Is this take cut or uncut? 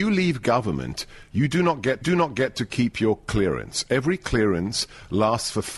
cut